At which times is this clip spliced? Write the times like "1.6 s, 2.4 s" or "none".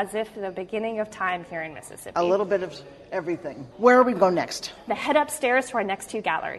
3.7 s, 4.2 s, 4.9 s